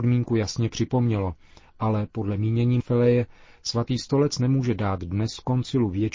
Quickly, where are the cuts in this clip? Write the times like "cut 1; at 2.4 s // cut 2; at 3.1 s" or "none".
cut 1; at 2.8 s